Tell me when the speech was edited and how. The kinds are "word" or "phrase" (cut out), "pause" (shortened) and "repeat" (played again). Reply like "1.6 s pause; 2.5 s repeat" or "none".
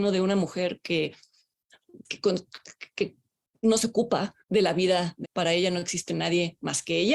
2.0 s word; 4.4 s pause; 5.2 s word